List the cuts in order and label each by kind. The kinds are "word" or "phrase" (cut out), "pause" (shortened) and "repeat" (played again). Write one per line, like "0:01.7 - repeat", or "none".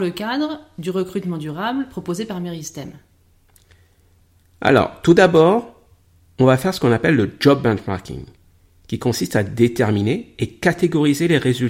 none